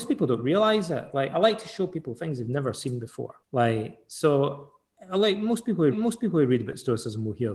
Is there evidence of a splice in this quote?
yes; 2 cuts; at 3.4 s, 5.9 s

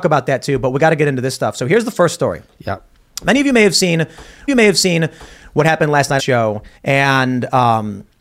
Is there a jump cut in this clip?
yes; 3 cuts; at 4.5 s, 6.2 s, 6.8 s

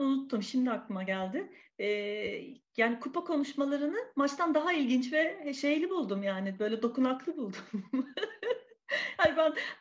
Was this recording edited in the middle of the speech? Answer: no; 0 cuts

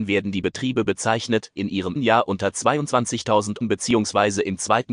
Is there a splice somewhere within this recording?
yes; 3 cuts; at 1.6 s, 2.0 s, 3.6 s

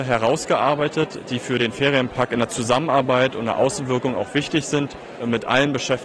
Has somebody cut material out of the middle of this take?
no; 0 cuts

